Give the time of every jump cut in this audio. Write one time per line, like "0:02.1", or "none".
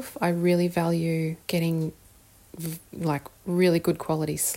0:01.4